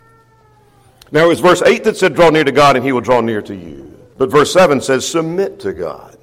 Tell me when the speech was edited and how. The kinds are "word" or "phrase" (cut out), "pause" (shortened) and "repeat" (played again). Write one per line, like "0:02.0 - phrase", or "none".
0:04.1 - pause

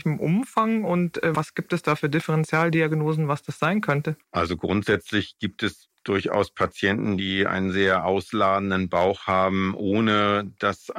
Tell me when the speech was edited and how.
0:04.2 - pause

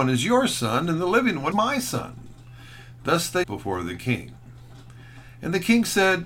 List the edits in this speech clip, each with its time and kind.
0:01.5 - word
0:03.4 - word

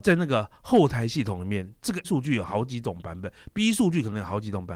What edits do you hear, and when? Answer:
0:02.0 - word

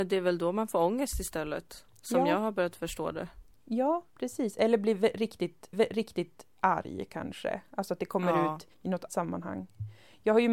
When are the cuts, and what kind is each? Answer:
0:04.1 - pause
0:05.7 - repeat
0:08.7 - pause
0:09.1 - word

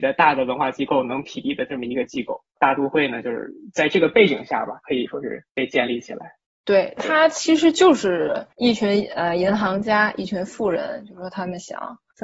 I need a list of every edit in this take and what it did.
0:02.5 - pause
0:06.4 - pause

